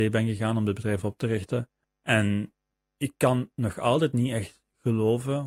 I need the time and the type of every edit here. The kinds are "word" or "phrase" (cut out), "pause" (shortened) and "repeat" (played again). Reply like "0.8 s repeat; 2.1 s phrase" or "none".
1.8 s pause